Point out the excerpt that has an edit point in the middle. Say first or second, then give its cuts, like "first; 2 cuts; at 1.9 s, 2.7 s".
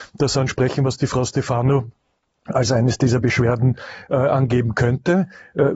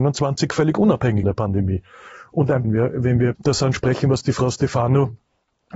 second; 3 cuts; at 1.2 s, 2.6 s, 3.4 s